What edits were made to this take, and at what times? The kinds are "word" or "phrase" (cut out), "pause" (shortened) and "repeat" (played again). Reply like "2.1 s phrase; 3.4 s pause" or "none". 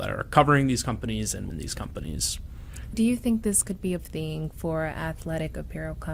1.5 s word; 2.9 s word; 4.0 s word